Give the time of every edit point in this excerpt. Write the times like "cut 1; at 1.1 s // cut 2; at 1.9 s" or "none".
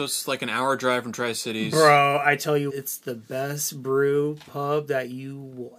cut 1; at 2.7 s